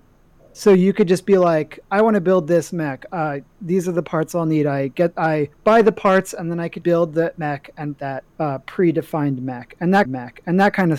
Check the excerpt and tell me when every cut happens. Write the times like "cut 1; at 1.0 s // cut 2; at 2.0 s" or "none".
cut 1; at 5.5 s // cut 2; at 6.8 s // cut 3; at 8.0 s // cut 4; at 8.3 s // cut 5; at 10.1 s

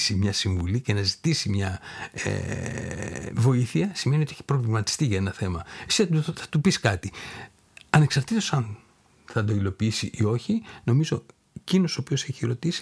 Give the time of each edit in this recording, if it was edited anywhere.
none

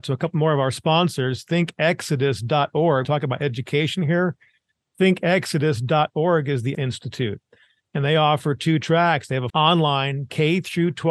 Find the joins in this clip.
cut 1; at 3.0 s // cut 2; at 6.7 s // cut 3; at 9.5 s

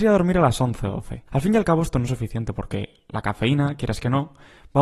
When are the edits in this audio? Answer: cut 1; at 1.3 s

